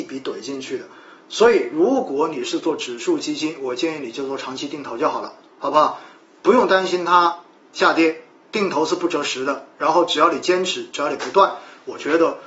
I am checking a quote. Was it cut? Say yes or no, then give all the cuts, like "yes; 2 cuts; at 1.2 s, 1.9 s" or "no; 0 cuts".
yes; 1 cut; at 8.3 s